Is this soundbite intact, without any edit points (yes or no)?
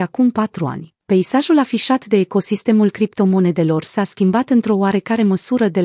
no